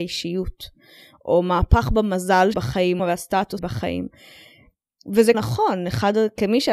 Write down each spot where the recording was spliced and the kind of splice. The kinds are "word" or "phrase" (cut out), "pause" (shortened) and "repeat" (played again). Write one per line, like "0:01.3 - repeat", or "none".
0:02.5 - word
0:03.0 - phrase
0:03.6 - word
0:05.3 - phrase